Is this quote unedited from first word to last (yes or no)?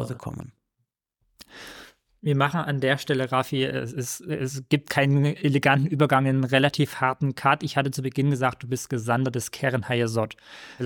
yes